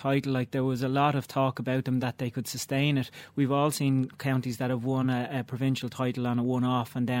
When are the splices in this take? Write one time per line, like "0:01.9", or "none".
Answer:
none

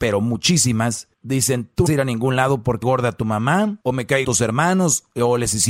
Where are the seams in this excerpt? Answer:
0:01.1
0:01.9
0:02.8
0:03.8
0:04.2

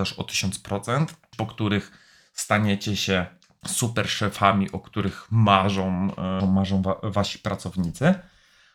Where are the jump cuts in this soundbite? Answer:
0:01.3
0:06.4

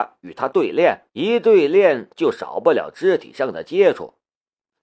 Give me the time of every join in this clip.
0:01.1

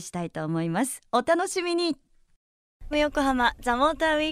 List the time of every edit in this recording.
0:02.9

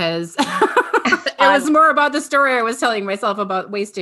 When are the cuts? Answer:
0:01.6

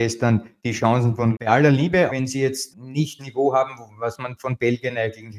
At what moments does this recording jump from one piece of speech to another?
0:01.3
0:02.1
0:02.7
0:03.2

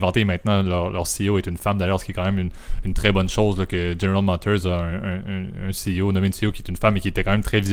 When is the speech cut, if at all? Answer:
none

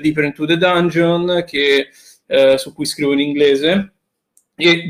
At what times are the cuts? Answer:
none

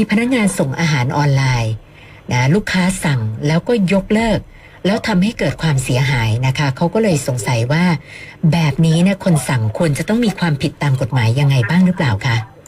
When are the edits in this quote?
none

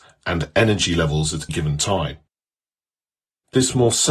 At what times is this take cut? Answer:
0:01.5

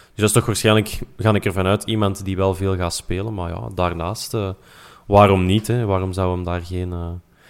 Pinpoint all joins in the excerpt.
none

